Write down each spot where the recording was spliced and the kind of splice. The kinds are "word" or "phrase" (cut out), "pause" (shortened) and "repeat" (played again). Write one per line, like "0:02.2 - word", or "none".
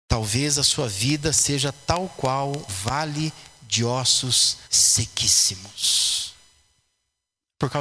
0:02.7 - word
0:04.6 - pause